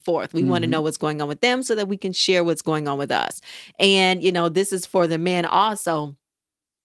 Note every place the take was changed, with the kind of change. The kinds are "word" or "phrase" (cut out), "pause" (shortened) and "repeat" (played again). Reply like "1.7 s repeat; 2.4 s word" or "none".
none

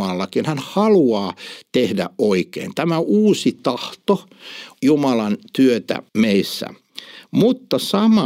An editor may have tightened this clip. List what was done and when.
4.8 s word; 6.1 s pause

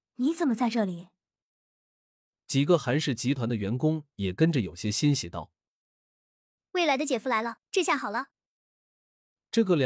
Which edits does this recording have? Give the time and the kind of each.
7.7 s pause

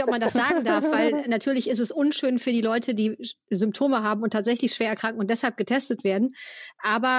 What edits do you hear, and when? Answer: none

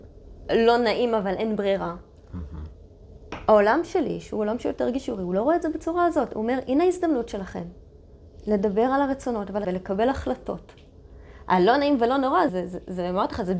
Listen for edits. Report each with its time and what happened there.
9.6 s word; 12.5 s word

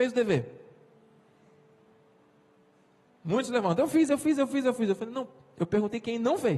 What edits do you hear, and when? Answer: none

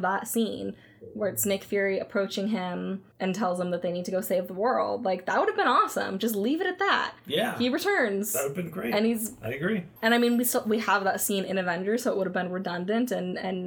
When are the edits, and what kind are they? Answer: 3.1 s pause; 7.2 s pause; 10.0 s pause

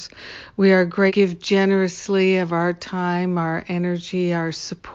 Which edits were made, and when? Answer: 1.1 s phrase

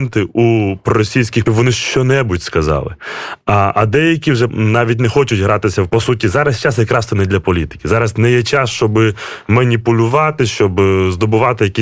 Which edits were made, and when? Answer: 1.5 s phrase; 4.5 s word; 5.9 s phrase

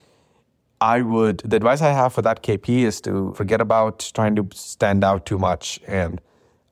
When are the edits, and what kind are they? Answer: 3.3 s word

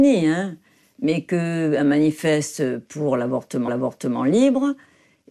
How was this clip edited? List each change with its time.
3.7 s repeat

